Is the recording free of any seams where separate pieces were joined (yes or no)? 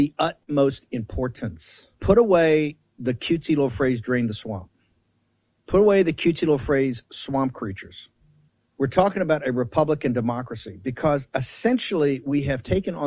no